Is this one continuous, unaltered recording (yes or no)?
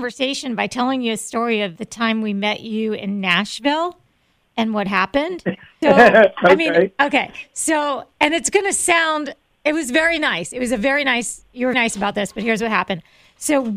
no